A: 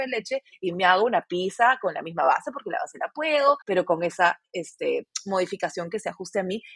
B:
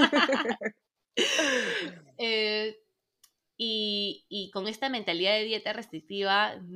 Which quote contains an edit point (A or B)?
A